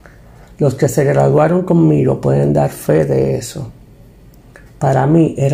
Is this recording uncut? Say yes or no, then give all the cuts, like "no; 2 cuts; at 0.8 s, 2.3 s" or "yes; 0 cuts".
yes; 0 cuts